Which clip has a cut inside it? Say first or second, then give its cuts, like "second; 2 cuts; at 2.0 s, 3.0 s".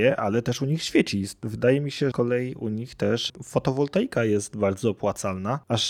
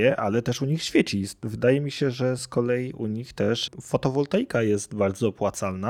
first; 1 cut; at 2.1 s